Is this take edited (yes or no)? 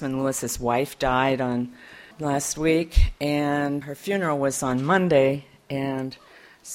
yes